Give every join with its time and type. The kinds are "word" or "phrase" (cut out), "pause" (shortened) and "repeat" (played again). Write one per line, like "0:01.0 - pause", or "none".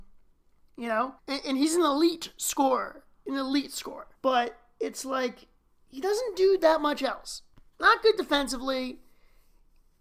0:01.2 - pause
0:04.2 - pause
0:05.7 - pause
0:07.7 - pause